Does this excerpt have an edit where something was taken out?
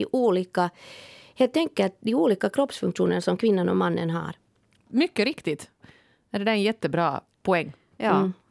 no; 0 cuts

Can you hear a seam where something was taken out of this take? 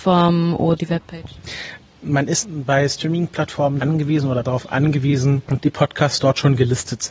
yes; 4 cuts; at 2.4 s, 3.8 s, 4.4 s, 5.6 s

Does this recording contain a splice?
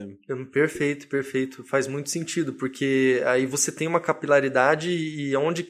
no; 0 cuts

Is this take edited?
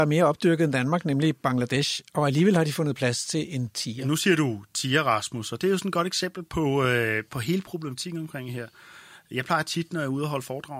no; 0 cuts

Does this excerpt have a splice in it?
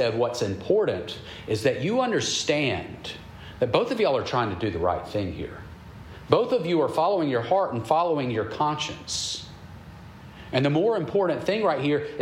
no; 0 cuts

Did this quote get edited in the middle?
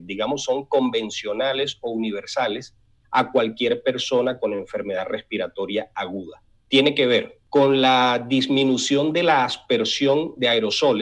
no; 0 cuts

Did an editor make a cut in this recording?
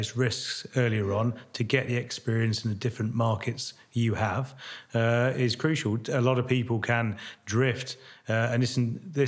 no; 0 cuts

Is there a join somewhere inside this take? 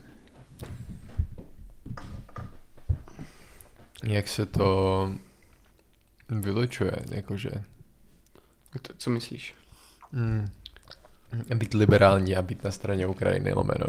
no; 0 cuts

